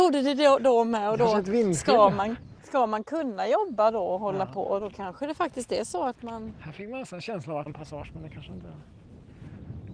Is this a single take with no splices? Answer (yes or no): no